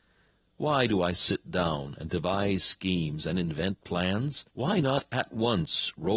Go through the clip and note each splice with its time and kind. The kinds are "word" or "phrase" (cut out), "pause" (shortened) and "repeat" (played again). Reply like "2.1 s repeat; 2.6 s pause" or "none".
4.5 s pause